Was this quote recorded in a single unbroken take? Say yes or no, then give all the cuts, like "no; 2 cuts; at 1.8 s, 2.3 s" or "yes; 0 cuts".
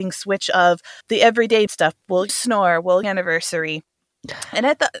no; 4 cuts; at 1.0 s, 1.7 s, 2.3 s, 3.0 s